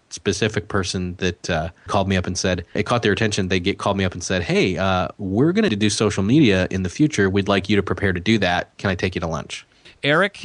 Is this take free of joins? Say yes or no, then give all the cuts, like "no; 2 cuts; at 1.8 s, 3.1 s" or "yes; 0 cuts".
no; 3 cuts; at 1.9 s, 2.8 s, 5.7 s